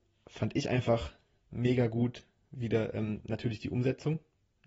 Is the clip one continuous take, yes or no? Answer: yes